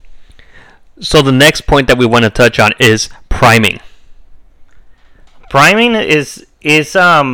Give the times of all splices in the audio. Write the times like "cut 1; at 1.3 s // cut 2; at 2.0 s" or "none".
none